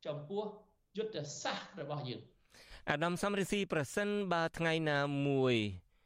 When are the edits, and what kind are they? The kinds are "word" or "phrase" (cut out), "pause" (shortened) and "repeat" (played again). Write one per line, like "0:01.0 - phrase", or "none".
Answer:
none